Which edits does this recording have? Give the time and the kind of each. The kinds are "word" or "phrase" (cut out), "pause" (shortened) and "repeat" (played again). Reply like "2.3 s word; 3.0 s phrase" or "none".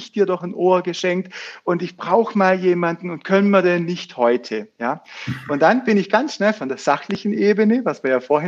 none